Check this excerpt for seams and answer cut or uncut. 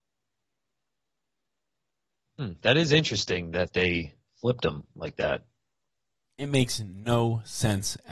uncut